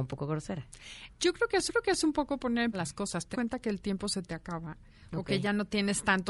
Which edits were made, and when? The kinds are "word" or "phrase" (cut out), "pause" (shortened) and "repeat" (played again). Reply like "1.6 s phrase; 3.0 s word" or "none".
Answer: 1.7 s repeat; 2.7 s word; 3.3 s word

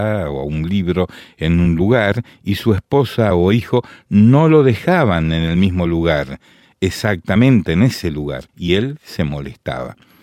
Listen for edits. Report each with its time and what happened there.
8.5 s pause

